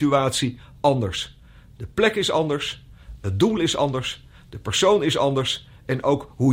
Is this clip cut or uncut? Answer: uncut